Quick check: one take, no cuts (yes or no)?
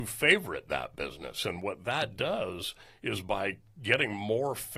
yes